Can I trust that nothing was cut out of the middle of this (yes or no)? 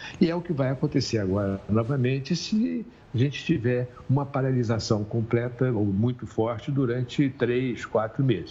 yes